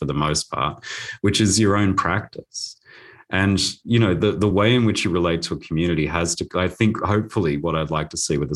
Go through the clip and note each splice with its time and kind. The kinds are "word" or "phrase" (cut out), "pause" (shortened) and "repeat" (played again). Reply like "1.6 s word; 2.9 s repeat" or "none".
none